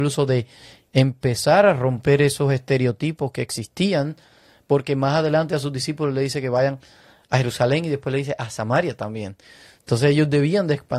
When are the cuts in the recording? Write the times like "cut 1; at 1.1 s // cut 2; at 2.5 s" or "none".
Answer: none